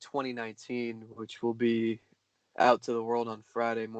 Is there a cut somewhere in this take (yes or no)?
no